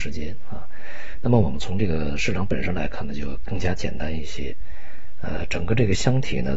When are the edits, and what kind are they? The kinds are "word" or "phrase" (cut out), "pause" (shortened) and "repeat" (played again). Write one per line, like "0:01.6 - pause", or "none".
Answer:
none